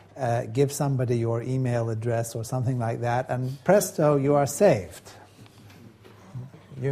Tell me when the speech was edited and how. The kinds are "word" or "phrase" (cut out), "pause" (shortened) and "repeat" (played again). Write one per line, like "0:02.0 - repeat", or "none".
none